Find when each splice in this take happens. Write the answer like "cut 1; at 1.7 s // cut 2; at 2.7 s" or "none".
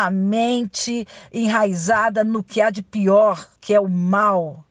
cut 1; at 3.6 s